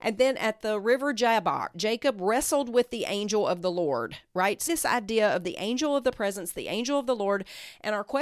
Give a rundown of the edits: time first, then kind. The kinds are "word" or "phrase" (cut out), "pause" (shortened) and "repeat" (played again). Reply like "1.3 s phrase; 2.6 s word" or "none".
1.7 s word; 4.7 s phrase